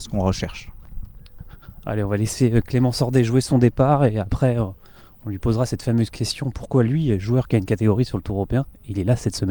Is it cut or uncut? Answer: uncut